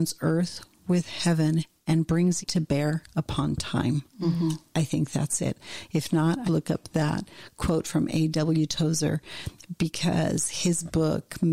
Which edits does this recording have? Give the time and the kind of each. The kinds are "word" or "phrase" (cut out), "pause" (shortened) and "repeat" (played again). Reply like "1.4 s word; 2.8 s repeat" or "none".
2.4 s word; 6.5 s phrase